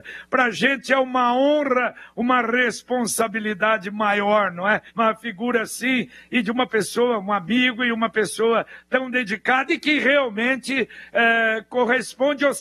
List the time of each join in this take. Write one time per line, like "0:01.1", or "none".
0:04.9